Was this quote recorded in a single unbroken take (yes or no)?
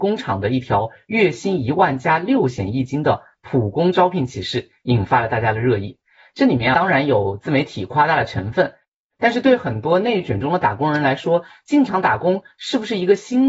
yes